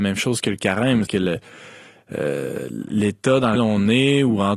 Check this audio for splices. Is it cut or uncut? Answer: cut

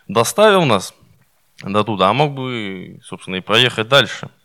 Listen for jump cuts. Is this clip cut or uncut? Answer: uncut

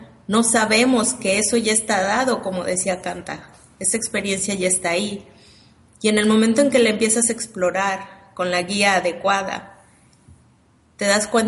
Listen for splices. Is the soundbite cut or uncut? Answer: uncut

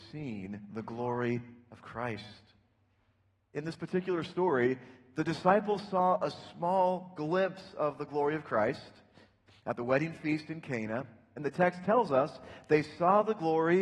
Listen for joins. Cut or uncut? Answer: uncut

